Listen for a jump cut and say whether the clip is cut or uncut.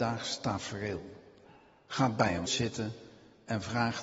cut